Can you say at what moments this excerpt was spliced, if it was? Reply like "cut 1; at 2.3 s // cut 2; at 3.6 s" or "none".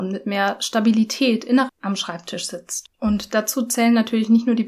cut 1; at 1.7 s // cut 2; at 2.9 s